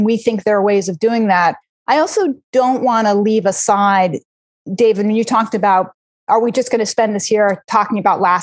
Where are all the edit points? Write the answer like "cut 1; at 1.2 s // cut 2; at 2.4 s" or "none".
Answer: none